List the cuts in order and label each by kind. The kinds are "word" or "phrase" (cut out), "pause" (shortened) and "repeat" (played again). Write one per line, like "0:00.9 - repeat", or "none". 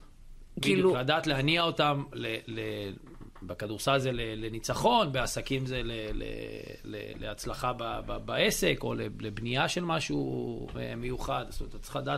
none